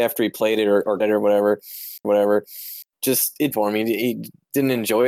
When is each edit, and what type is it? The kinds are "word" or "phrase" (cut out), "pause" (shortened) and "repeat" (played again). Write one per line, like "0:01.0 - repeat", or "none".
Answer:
0:01.0 - word
0:02.0 - repeat
0:03.5 - phrase